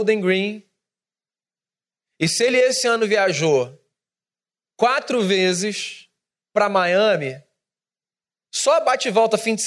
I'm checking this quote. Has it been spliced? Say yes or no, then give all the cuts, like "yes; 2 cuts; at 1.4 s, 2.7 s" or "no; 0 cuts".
no; 0 cuts